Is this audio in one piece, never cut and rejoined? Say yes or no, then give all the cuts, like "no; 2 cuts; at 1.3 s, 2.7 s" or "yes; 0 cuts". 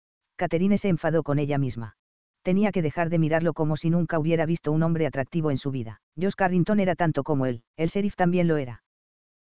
no; 3 cuts; at 2.1 s, 6.1 s, 7.7 s